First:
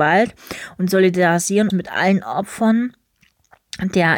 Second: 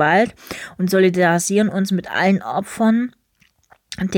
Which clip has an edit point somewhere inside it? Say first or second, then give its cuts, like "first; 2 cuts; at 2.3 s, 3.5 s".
first; 1 cut; at 1.7 s